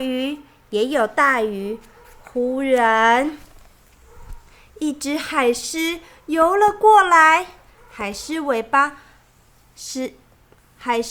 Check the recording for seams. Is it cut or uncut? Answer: uncut